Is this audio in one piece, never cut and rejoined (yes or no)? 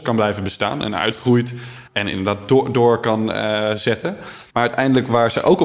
no